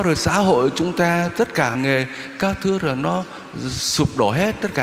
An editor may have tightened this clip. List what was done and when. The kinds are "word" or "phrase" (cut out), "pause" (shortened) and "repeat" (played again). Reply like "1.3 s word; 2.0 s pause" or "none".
1.7 s phrase